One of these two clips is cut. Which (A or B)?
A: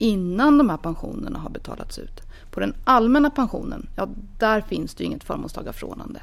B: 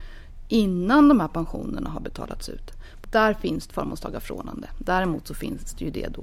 B